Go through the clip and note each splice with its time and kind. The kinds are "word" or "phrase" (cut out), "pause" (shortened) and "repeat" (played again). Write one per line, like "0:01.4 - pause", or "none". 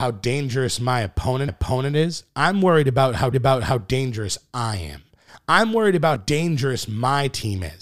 0:01.5 - repeat
0:03.3 - repeat
0:06.2 - word